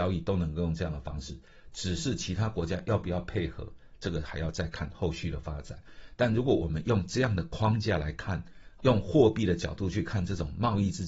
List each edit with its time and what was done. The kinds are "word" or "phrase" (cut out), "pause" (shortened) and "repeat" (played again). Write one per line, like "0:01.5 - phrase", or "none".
0:08.8 - word

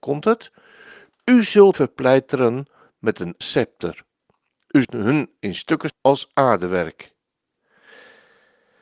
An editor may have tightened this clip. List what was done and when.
0:01.7 - word
0:03.4 - word
0:04.8 - word
0:05.9 - word

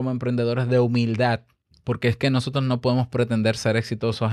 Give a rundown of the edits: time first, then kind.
0:01.7 - pause

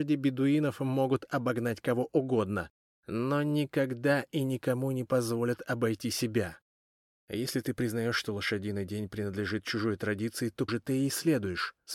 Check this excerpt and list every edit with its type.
0:10.7 - word

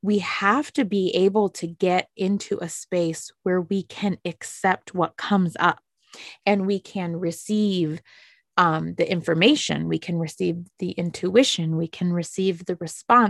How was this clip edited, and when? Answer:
none

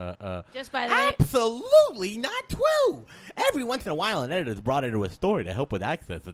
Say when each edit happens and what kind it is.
none

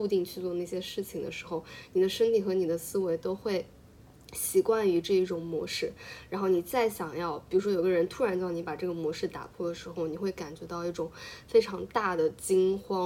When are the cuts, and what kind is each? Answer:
none

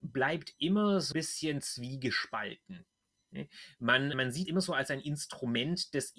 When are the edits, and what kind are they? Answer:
0:01.1 - word
0:04.1 - word
0:04.5 - word

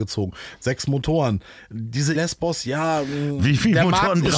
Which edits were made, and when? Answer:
0:02.1 - word

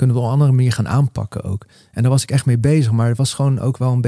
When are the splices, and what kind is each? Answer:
0:01.7 - pause

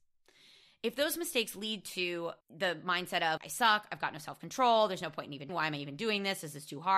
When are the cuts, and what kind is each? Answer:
0:02.4 - pause
0:03.4 - word
0:05.5 - word

